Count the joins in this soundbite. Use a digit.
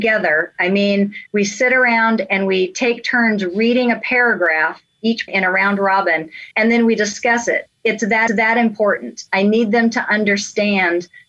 4